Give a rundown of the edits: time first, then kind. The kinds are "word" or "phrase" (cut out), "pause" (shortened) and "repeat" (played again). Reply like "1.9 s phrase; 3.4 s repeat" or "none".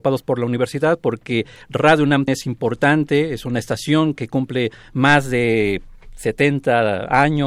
2.3 s word